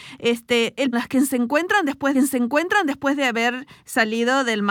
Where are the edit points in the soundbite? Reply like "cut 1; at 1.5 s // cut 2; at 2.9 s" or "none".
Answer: cut 1; at 0.9 s // cut 2; at 2.1 s